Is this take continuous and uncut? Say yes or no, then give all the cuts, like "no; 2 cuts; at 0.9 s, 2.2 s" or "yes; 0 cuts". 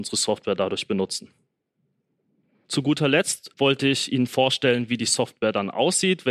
yes; 0 cuts